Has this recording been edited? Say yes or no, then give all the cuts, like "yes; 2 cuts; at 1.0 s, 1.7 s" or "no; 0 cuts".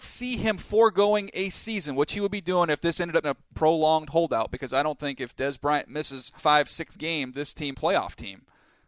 yes; 4 cuts; at 3.2 s, 6.4 s, 7.3 s, 7.7 s